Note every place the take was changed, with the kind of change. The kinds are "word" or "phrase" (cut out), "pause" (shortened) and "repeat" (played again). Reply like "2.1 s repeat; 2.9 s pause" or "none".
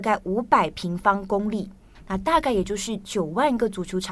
none